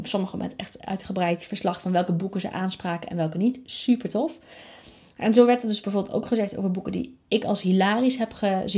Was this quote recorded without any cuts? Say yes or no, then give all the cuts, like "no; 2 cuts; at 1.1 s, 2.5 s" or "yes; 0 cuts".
yes; 0 cuts